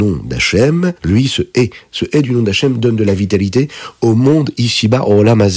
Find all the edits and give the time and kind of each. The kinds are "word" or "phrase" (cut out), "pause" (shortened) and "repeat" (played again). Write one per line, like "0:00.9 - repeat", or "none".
0:01.0 - pause

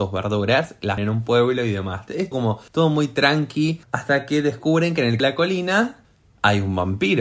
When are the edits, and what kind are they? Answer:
0:01.0 - word
0:02.3 - word
0:02.7 - pause
0:03.8 - pause
0:05.2 - phrase
0:06.0 - pause

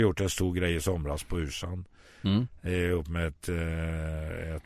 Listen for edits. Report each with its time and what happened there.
none

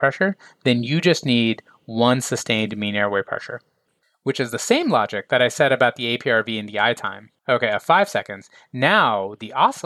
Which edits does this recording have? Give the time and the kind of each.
0:07.4 - pause

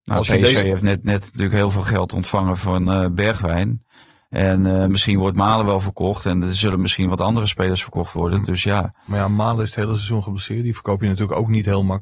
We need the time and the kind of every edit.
none

